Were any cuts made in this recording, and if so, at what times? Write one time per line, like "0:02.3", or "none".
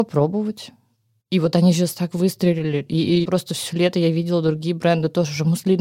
0:03.3